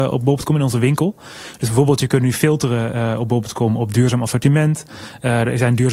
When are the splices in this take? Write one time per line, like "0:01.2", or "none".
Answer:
none